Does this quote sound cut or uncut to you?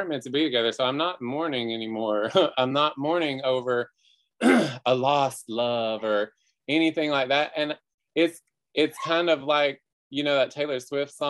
uncut